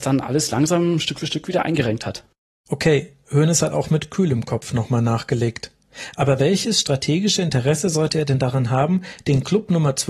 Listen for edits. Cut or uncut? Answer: uncut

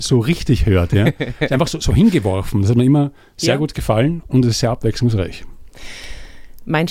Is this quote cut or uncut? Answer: uncut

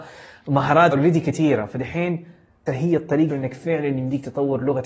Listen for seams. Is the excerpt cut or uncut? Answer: cut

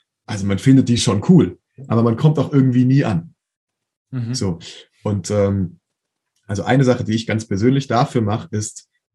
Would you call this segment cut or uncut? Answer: uncut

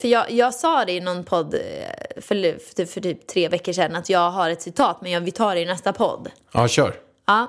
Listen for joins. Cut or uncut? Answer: uncut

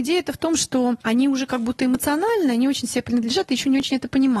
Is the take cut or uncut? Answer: cut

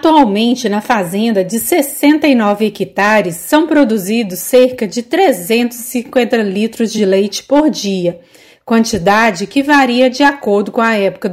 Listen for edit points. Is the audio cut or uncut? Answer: uncut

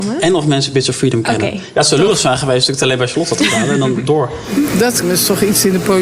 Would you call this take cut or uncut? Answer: cut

